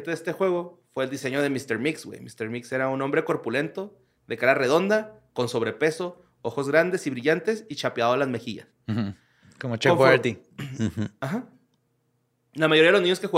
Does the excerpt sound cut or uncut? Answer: uncut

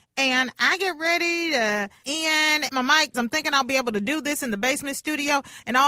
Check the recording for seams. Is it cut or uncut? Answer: cut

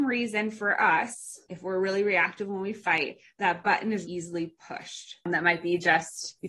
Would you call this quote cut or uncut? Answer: cut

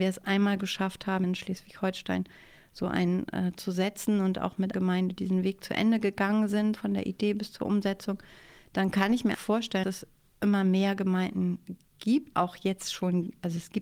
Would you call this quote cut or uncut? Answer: cut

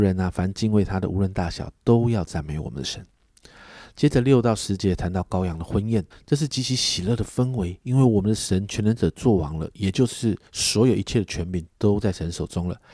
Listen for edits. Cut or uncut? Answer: cut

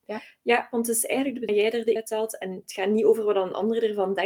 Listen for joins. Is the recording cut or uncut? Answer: cut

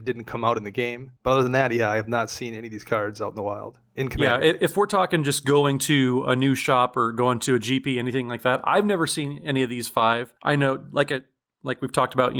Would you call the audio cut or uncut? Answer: cut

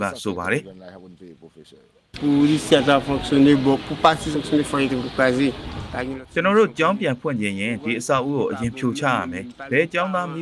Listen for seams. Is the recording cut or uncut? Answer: cut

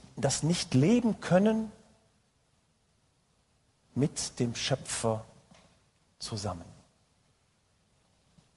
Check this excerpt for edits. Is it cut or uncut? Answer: uncut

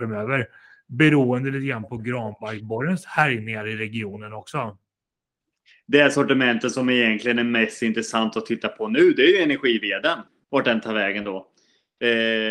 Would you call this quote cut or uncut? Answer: cut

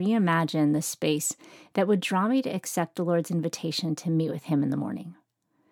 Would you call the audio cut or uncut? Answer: uncut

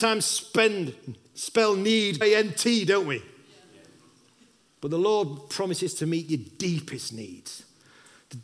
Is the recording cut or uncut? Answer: cut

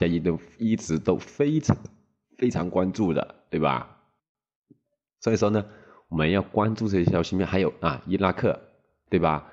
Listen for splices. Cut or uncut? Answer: uncut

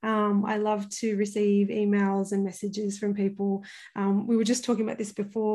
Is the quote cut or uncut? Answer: uncut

